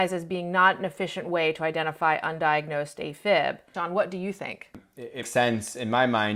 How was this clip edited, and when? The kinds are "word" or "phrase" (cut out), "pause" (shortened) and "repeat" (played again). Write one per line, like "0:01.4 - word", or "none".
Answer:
0:05.2 - word